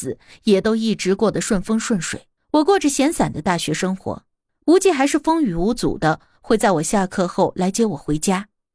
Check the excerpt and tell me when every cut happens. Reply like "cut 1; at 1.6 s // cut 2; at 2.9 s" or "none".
cut 1; at 2.4 s // cut 2; at 4.5 s